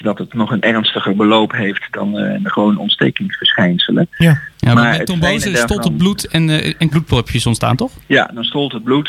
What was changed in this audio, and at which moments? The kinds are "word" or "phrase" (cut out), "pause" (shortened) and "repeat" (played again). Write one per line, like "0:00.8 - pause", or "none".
0:06.9 - word